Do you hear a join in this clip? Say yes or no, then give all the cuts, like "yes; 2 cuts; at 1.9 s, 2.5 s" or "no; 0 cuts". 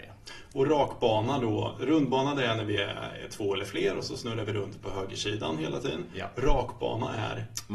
no; 0 cuts